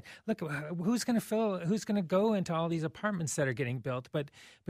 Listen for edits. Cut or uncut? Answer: uncut